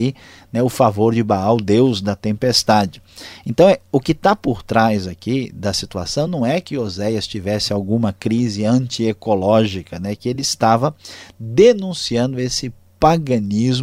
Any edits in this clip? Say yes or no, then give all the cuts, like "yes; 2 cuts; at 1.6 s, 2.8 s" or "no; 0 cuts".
no; 0 cuts